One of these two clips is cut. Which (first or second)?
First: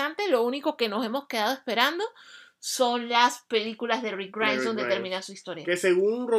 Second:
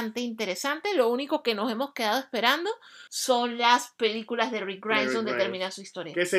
second